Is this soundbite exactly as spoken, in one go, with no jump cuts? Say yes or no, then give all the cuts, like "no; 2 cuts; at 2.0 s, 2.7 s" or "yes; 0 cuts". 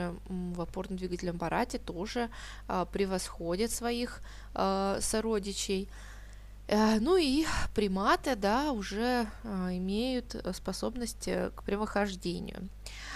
yes; 0 cuts